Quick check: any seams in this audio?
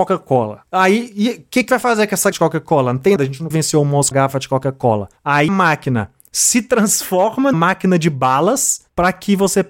yes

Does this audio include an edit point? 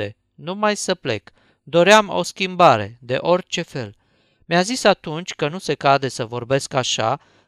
no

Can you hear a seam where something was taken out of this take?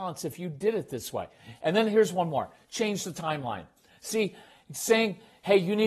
no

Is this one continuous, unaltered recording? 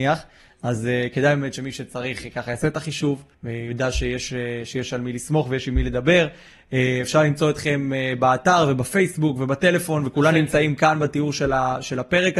no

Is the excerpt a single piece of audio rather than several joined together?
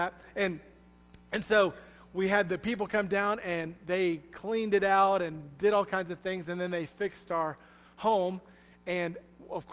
yes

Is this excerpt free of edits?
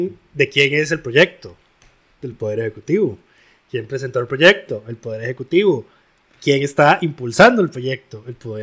yes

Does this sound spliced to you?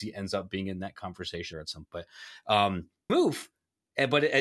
yes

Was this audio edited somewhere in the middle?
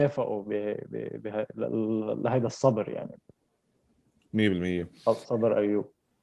no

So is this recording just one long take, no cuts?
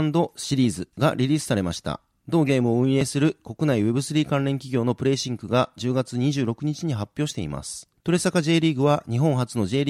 yes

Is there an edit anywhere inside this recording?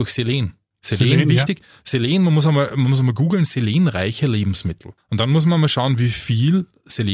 no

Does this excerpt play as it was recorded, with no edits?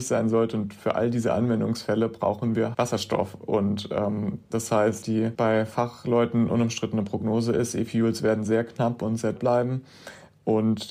no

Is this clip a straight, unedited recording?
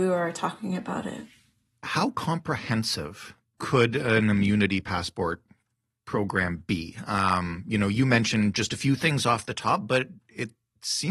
yes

